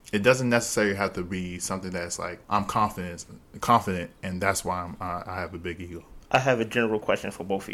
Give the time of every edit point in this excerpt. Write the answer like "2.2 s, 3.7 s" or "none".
2.4 s